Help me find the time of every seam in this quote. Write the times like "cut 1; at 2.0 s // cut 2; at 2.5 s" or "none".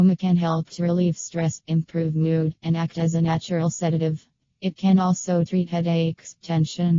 none